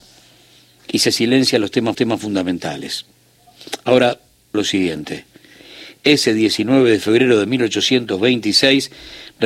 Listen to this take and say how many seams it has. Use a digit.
2